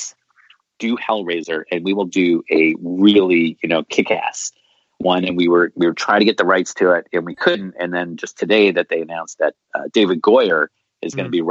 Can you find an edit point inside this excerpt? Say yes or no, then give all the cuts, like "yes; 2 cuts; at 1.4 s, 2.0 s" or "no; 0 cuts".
no; 0 cuts